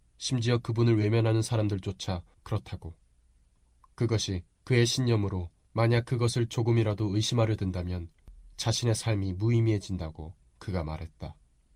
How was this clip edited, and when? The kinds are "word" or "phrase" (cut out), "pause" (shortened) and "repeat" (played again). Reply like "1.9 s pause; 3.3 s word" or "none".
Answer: none